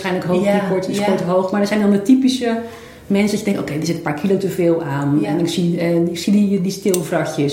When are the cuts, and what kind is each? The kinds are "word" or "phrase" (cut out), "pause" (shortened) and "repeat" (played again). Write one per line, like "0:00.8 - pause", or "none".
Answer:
none